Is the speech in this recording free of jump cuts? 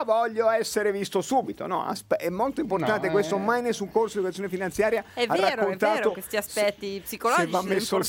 yes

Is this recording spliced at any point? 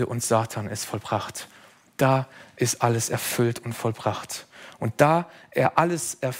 no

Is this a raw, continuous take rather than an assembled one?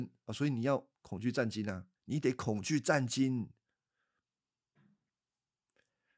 no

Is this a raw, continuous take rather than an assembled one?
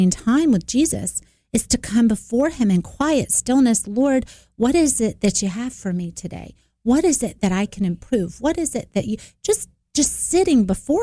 yes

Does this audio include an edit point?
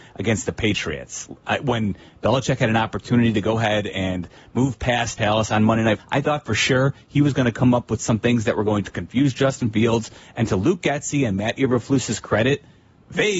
yes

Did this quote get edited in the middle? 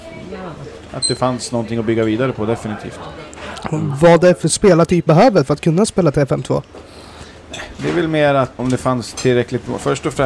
yes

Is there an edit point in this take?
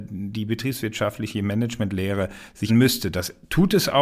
yes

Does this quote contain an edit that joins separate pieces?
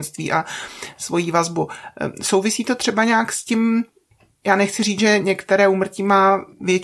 no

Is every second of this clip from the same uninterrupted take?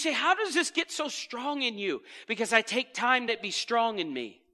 no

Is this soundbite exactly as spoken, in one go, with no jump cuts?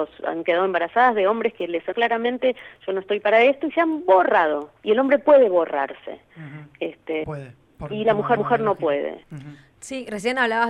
no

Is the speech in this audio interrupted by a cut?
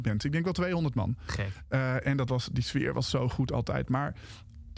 no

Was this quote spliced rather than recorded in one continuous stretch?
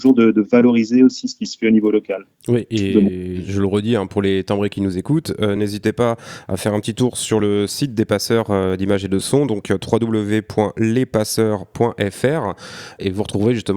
no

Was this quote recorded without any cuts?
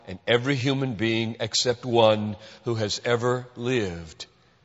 yes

